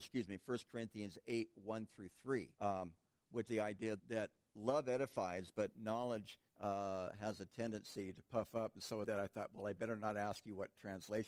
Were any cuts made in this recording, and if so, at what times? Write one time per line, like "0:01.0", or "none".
0:02.5
0:03.5
0:04.0
0:06.5
0:09.0

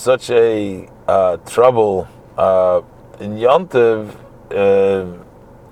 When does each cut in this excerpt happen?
0:02.2

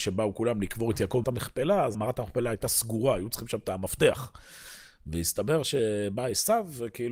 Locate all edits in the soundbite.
0:01.2
0:01.9

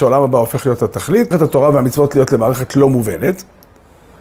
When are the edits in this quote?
0:01.3

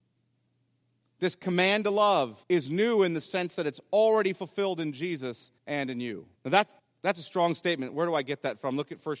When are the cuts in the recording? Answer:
0:02.4
0:05.6
0:06.4
0:06.8

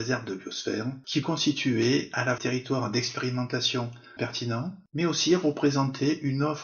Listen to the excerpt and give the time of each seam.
0:01.2
0:02.4
0:04.2

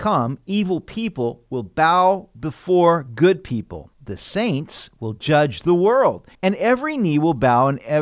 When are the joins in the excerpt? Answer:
0:03.9
0:06.3

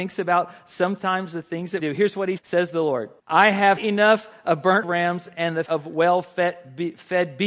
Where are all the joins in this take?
0:01.8
0:02.4
0:03.2
0:03.8
0:04.8
0:05.7

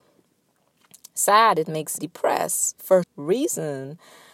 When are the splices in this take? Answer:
0:02.0
0:03.0

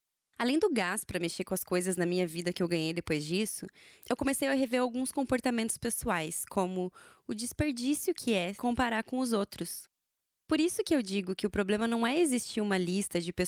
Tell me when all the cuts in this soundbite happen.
0:08.6

